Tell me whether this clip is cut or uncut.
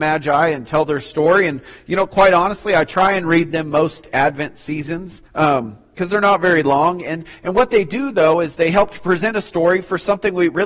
cut